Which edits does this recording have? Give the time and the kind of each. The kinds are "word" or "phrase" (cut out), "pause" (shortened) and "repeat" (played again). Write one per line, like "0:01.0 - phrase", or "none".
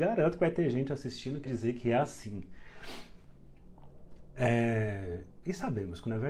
0:01.5 - word